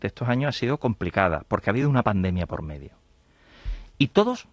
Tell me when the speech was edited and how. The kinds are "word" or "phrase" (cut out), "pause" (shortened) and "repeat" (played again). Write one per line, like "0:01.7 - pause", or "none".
none